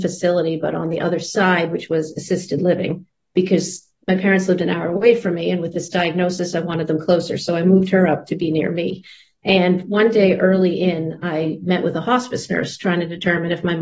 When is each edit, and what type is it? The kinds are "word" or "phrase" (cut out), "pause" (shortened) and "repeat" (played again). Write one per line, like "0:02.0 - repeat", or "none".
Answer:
none